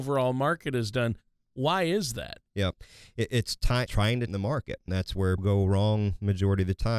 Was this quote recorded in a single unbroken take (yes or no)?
no